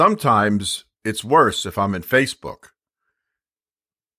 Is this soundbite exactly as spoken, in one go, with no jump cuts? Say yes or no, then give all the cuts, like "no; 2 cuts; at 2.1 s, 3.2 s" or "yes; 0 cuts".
yes; 0 cuts